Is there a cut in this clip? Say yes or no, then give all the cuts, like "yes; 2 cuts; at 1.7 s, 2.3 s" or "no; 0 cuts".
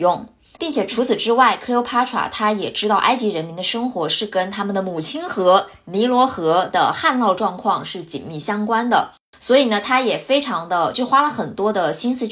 no; 0 cuts